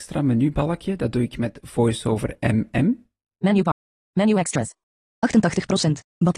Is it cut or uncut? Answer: uncut